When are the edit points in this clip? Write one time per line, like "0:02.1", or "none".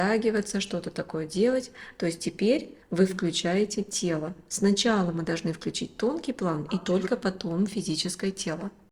0:02.8